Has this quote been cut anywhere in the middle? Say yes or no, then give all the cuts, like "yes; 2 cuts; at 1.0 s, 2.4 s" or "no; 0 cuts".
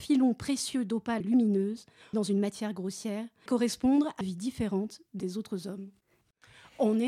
yes; 5 cuts; at 1.2 s, 2.1 s, 3.5 s, 4.2 s, 5.2 s